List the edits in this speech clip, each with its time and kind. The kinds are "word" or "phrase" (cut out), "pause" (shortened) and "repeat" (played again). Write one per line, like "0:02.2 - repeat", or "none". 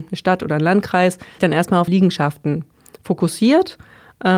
0:01.4 - word
0:01.9 - word